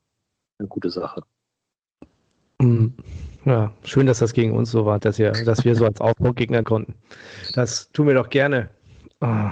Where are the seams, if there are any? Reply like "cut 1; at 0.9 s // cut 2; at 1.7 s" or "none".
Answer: cut 1; at 3.4 s // cut 2; at 5.0 s // cut 3; at 6.6 s